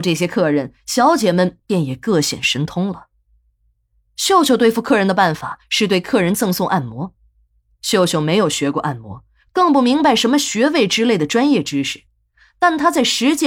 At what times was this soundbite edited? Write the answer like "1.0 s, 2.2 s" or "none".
none